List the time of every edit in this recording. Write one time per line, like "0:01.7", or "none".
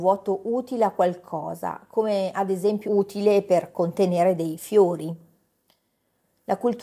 0:02.9